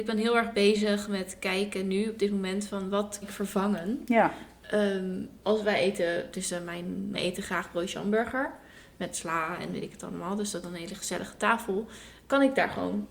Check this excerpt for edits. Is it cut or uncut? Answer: cut